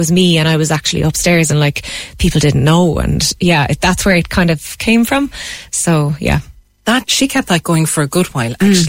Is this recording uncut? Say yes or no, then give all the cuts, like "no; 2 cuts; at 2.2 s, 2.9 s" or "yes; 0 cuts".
yes; 0 cuts